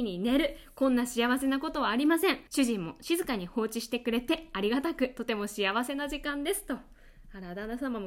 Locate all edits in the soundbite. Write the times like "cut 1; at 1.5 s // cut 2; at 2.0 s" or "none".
cut 1; at 2.5 s